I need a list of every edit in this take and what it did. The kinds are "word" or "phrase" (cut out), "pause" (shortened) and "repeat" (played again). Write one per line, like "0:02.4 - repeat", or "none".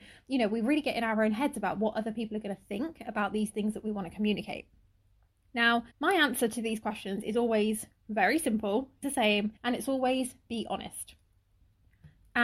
0:05.9 - pause
0:09.0 - word
0:09.6 - pause